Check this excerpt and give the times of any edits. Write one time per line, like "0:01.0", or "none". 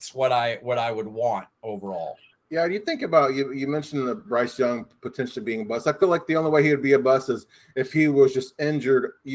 none